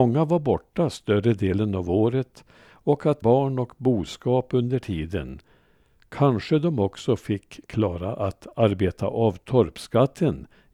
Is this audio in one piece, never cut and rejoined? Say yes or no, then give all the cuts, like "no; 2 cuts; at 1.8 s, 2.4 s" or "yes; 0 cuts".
no; 1 cut; at 3.2 s